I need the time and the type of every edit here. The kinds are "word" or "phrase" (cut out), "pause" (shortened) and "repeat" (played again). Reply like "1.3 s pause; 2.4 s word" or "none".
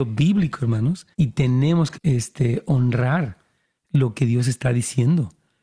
1.1 s pause; 2.0 s word